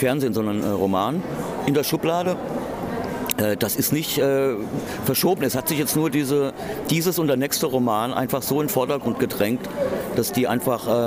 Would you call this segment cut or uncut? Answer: uncut